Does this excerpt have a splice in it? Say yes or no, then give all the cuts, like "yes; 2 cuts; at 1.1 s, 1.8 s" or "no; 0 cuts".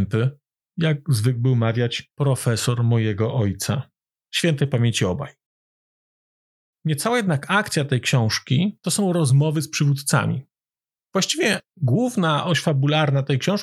no; 0 cuts